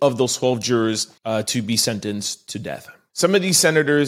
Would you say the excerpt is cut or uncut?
cut